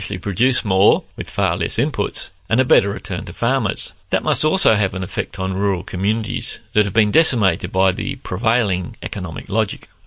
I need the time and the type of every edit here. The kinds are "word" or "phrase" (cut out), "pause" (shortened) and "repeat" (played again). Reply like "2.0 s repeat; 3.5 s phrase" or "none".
1.1 s pause; 2.4 s pause; 4.0 s pause